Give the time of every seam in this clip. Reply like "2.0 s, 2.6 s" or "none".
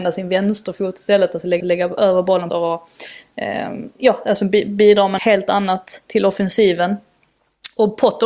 1.6 s, 2.5 s, 5.2 s

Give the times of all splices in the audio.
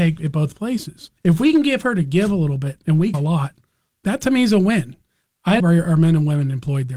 1.2 s, 3.1 s, 5.6 s

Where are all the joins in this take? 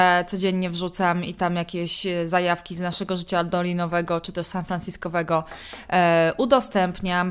none

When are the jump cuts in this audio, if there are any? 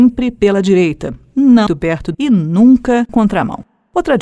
1.7 s, 2.1 s, 3.1 s

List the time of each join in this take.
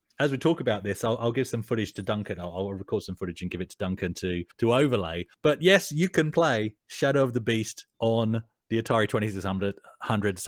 4.5 s, 5.3 s, 7.9 s

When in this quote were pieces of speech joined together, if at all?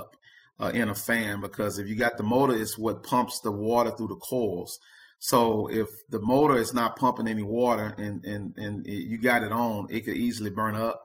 none

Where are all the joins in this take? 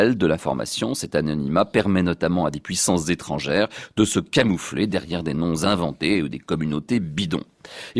none

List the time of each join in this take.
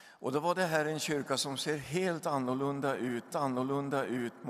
3.3 s

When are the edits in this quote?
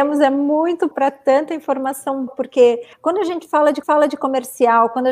0.9 s, 2.3 s, 2.9 s, 3.8 s

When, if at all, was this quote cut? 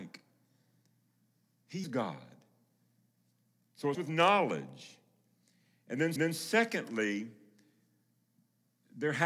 1.8 s, 3.9 s, 6.2 s

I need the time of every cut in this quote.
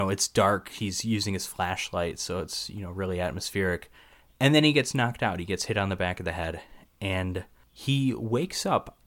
none

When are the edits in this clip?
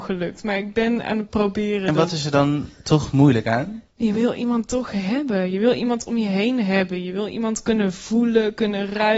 3.9 s

